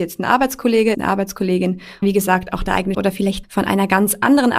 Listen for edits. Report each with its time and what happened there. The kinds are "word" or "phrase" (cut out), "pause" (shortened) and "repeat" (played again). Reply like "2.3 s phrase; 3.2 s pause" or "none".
0.9 s word; 2.0 s word; 2.9 s word; 3.4 s word

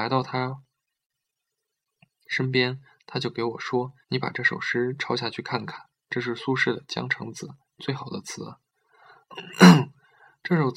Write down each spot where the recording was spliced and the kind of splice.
4.0 s pause

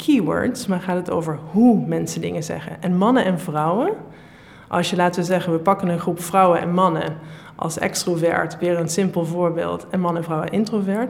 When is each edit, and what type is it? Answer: none

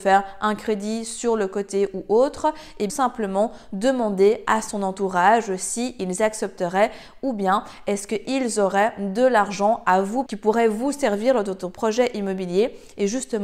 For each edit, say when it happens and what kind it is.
2.9 s phrase; 10.3 s word

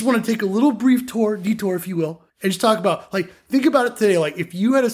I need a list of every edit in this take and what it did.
2.3 s pause

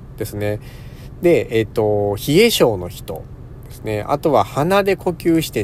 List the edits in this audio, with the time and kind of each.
none

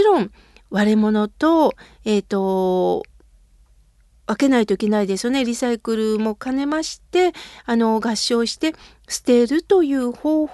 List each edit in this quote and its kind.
none

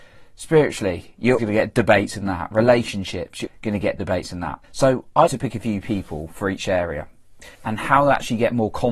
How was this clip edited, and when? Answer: 1.4 s word; 3.5 s word; 4.0 s word; 4.6 s pause; 5.3 s word; 7.5 s pause

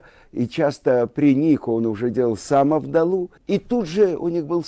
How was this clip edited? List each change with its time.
3.4 s pause

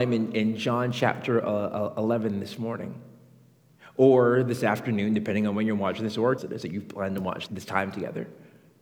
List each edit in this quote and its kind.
6.4 s phrase; 7.5 s word

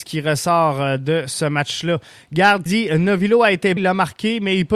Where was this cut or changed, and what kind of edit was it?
2.7 s word; 3.8 s word

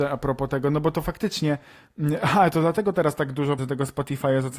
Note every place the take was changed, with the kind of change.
3.6 s word

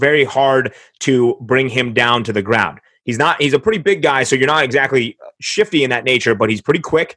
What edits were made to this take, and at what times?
none

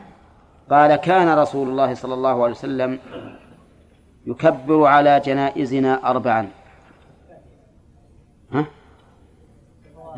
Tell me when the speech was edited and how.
none

